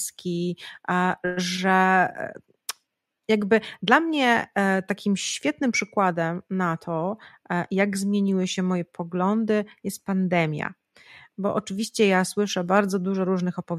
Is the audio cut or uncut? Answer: uncut